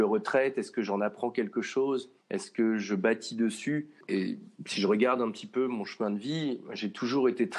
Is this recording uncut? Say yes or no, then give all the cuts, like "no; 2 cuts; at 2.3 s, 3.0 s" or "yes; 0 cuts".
no; 1 cut; at 2.2 s